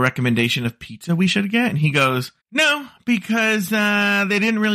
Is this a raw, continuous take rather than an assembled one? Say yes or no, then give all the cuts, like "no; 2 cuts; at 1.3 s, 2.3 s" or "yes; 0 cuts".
no; 1 cut; at 2.4 s